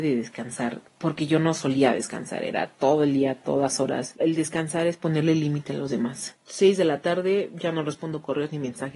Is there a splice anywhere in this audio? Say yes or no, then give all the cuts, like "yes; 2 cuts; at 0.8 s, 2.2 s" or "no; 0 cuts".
yes; 1 cut; at 4.2 s